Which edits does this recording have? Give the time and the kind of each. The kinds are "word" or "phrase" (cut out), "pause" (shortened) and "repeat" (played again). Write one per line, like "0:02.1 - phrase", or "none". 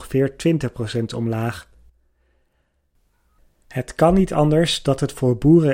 none